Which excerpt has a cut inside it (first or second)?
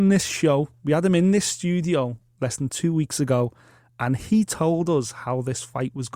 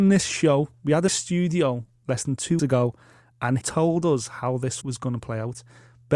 second